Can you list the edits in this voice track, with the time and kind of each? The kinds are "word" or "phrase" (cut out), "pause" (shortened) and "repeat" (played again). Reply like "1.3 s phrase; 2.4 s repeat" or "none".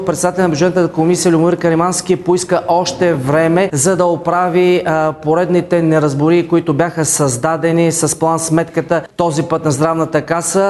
none